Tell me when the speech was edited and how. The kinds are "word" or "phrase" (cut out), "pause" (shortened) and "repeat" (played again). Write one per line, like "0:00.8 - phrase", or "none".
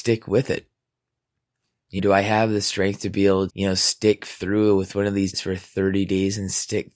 0:02.0 - word
0:03.5 - word
0:05.3 - word